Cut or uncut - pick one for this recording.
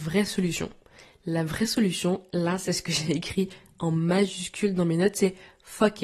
uncut